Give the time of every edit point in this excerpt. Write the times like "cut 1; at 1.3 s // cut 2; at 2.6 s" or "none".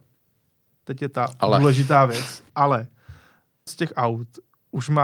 cut 1; at 3.7 s